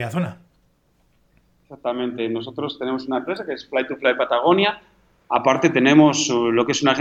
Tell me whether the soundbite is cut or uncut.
uncut